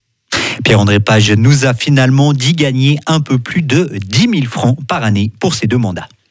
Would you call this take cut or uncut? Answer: uncut